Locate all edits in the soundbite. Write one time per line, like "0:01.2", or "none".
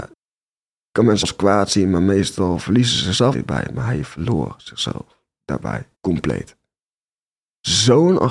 0:01.2
0:03.3
0:05.9